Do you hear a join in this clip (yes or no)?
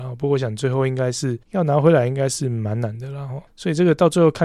yes